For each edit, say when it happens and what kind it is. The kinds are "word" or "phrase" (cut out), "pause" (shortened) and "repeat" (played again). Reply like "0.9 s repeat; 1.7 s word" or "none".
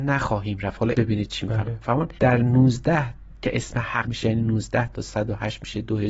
0.9 s word; 4.0 s word